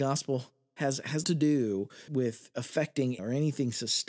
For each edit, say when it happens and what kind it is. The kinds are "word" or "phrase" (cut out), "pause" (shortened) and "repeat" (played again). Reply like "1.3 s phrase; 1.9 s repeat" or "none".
1.2 s word; 2.1 s word; 3.2 s word